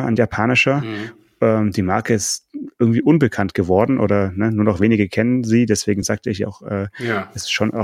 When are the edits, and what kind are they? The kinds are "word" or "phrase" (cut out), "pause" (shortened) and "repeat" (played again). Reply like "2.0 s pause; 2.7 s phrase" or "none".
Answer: none